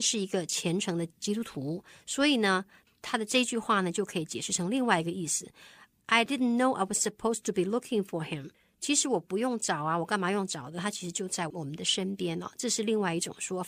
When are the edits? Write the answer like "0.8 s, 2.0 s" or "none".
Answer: none